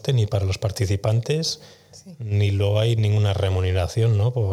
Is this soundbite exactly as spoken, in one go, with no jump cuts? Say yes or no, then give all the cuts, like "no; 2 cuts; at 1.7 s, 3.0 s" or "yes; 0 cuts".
yes; 0 cuts